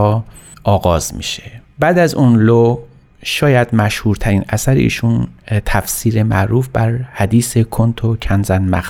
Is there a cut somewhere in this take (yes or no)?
no